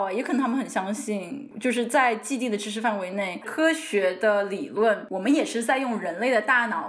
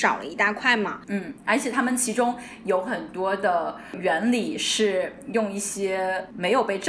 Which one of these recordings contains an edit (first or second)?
first